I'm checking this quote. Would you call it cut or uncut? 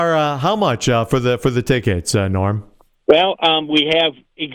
uncut